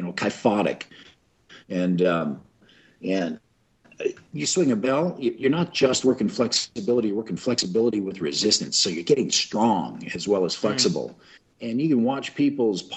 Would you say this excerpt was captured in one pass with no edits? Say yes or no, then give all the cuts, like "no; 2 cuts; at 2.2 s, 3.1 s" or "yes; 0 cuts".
yes; 0 cuts